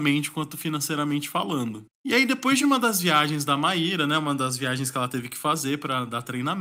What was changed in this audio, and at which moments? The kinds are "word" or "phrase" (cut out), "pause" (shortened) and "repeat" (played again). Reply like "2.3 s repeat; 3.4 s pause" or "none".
none